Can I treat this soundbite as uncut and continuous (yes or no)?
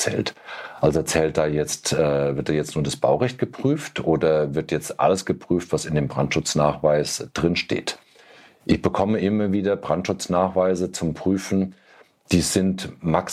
yes